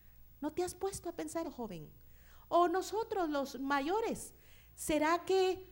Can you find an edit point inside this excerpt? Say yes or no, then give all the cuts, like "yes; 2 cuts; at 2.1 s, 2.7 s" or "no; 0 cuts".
yes; 1 cut; at 1.4 s